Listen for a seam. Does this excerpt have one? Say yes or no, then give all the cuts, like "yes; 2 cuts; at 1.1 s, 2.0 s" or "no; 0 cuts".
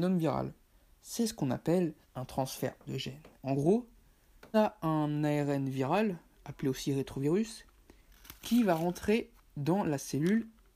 yes; 4 cuts; at 2.0 s, 2.9 s, 3.4 s, 4.5 s